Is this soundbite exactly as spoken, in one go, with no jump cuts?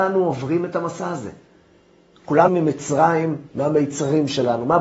no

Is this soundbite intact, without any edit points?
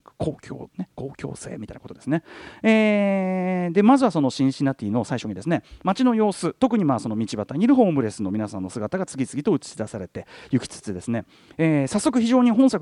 yes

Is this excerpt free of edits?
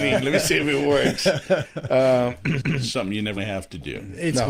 no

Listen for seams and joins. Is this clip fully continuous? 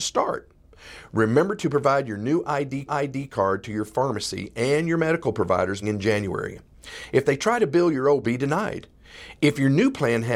no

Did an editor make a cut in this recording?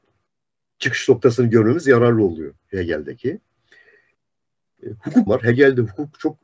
yes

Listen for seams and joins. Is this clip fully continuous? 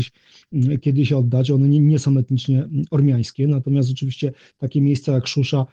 yes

